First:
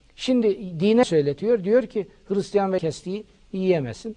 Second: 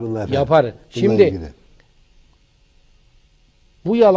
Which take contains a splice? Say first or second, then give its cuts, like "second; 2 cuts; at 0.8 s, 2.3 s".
first; 2 cuts; at 1.0 s, 2.8 s